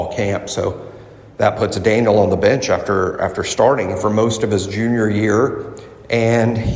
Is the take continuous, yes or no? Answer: yes